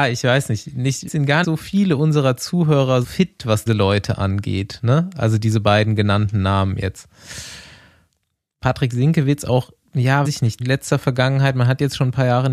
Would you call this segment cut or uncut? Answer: cut